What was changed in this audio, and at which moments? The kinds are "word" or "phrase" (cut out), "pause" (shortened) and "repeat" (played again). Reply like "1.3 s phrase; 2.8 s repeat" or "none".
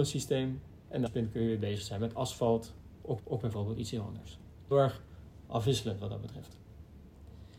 1.1 s word; 3.2 s repeat; 4.7 s word